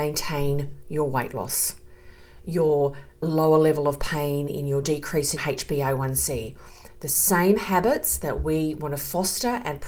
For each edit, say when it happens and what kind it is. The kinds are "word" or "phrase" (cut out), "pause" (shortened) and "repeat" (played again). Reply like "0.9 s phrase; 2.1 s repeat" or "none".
4.8 s phrase; 5.4 s word

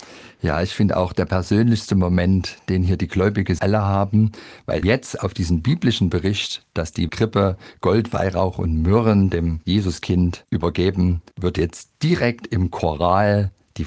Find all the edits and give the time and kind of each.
3.6 s phrase; 4.8 s word; 7.1 s phrase; 11.3 s pause

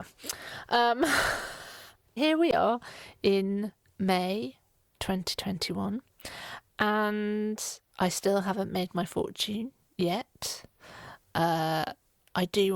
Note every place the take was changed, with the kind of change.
2.2 s word; 7.9 s pause

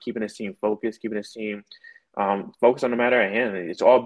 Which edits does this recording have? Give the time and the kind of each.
none

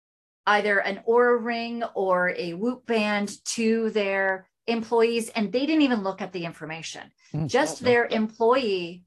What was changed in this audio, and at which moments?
none

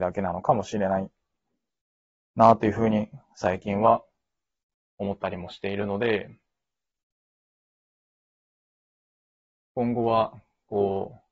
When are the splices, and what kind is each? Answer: none

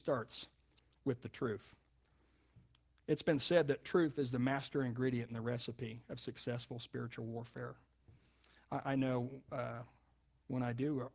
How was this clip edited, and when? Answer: none

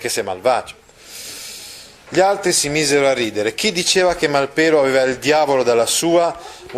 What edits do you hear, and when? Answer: none

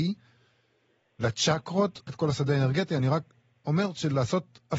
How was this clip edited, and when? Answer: 2.1 s word

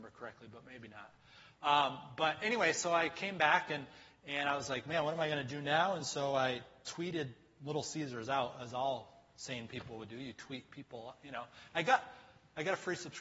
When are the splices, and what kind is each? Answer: none

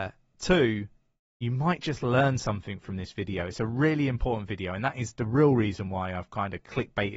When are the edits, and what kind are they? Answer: none

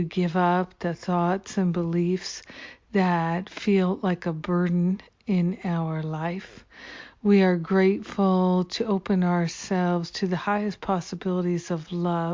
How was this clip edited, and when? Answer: none

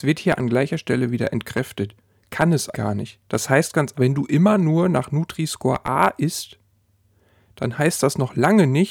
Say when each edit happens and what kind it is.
2.7 s word; 3.3 s pause; 3.9 s word

